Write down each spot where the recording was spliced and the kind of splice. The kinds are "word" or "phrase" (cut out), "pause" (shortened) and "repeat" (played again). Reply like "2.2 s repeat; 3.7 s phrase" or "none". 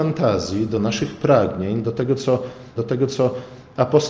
2.8 s repeat